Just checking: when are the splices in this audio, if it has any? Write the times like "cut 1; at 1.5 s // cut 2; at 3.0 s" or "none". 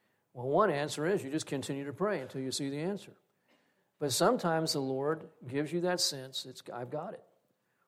none